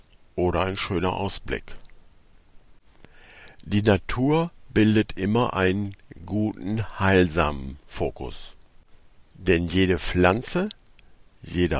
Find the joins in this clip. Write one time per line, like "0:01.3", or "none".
none